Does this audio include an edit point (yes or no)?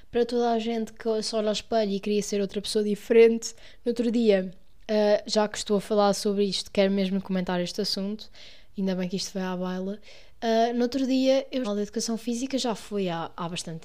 yes